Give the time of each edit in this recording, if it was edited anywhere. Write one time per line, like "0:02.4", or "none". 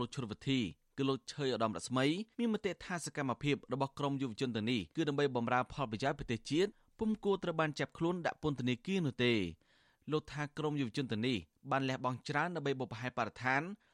0:02.3
0:04.9